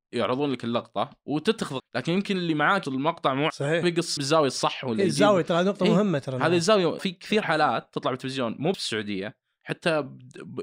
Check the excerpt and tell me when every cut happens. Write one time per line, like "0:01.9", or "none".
0:01.2
0:01.8
0:02.8
0:03.5
0:03.8
0:04.2
0:07.0
0:08.7